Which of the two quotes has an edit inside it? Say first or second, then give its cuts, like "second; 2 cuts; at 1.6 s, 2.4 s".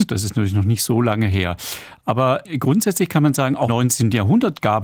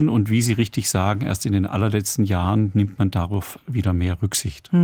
first; 1 cut; at 3.7 s